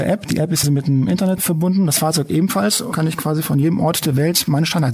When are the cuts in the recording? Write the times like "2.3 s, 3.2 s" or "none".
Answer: 2.9 s

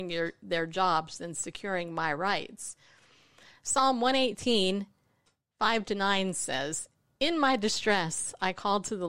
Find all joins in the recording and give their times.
none

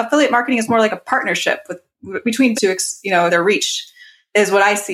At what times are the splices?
2.5 s, 3.3 s

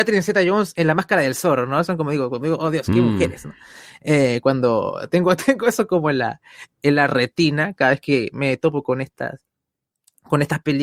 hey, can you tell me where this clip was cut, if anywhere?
none

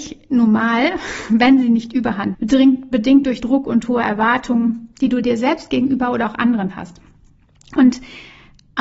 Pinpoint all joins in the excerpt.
2.3 s, 3.4 s

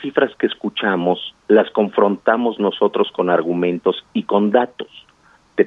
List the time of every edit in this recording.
1.4 s

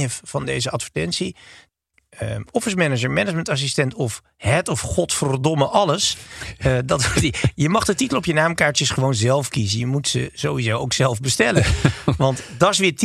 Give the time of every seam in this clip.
none

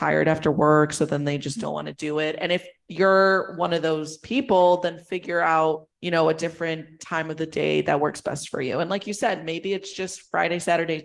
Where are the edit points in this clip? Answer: 5.9 s

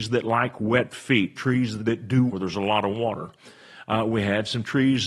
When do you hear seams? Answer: 1.8 s, 2.3 s

